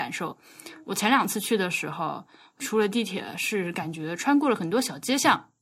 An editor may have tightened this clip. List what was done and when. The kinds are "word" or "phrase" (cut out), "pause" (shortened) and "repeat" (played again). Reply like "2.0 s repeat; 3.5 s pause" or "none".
2.6 s word